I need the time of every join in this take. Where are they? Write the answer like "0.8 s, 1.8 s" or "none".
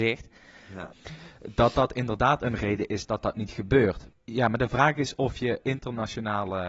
5.6 s